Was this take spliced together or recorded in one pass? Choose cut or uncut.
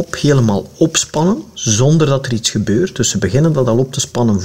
uncut